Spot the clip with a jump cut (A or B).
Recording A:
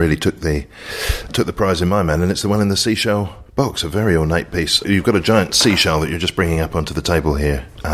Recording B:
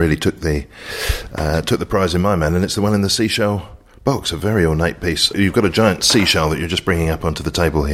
A